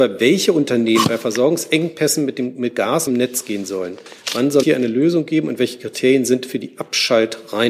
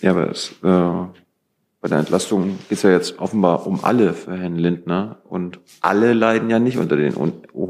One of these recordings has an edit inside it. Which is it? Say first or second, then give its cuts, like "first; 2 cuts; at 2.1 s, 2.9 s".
first; 2 cuts; at 3.1 s, 4.6 s